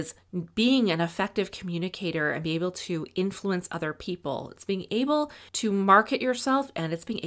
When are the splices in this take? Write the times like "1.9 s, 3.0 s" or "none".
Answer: 5.5 s